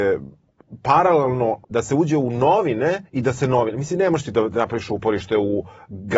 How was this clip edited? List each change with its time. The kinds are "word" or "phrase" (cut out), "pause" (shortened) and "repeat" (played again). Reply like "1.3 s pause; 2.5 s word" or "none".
1.6 s pause; 3.1 s pause